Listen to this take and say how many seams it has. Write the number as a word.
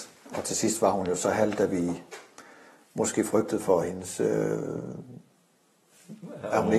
zero